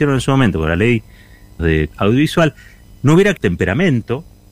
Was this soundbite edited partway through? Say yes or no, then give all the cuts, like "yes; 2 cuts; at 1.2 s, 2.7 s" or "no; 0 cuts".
yes; 3 cuts; at 1.6 s, 1.9 s, 3.4 s